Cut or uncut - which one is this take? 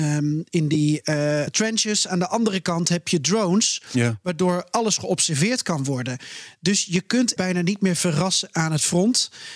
cut